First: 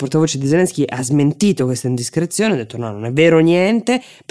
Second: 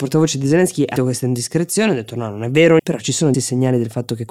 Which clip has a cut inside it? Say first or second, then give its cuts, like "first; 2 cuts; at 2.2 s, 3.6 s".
second; 3 cuts; at 1.0 s, 2.8 s, 3.3 s